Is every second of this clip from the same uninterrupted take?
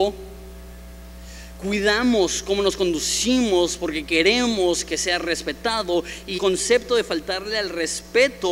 no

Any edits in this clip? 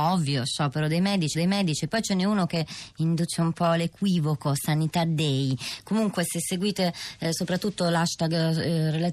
yes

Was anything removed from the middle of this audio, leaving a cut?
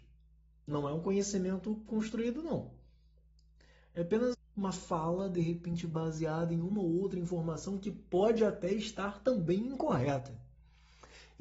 yes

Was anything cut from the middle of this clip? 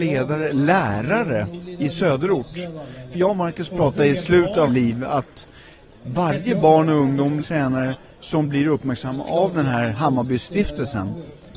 yes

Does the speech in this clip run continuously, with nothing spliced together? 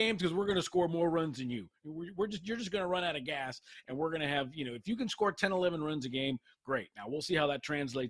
yes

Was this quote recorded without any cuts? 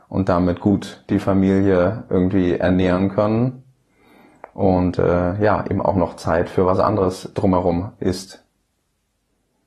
yes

